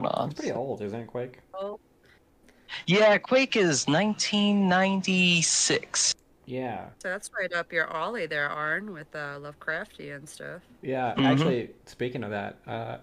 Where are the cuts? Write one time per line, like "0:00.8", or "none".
0:06.9